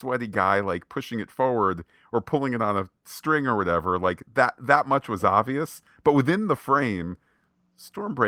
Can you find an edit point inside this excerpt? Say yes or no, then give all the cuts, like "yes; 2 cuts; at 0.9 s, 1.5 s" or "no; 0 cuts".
no; 0 cuts